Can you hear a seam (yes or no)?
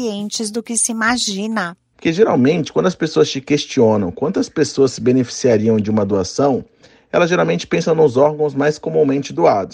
no